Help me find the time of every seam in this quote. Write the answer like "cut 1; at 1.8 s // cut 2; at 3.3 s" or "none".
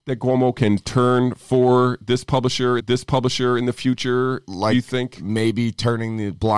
cut 1; at 2.8 s

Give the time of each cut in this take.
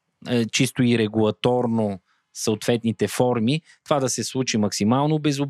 none

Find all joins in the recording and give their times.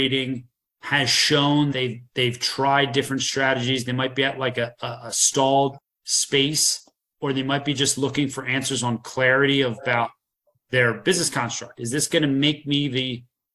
cut 1; at 1.7 s

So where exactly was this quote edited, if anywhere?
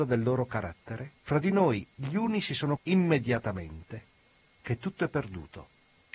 cut 1; at 1.2 s // cut 2; at 2.8 s

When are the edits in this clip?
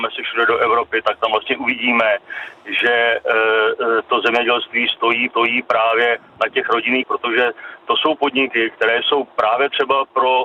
cut 1; at 1.0 s // cut 2; at 5.3 s // cut 3; at 7.0 s

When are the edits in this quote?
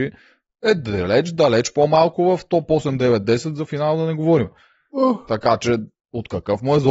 none

